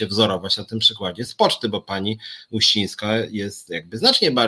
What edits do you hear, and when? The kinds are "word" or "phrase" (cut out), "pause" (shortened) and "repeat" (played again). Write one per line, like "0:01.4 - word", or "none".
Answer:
none